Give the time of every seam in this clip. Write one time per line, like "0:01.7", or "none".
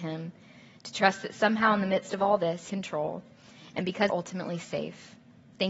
0:02.7
0:04.1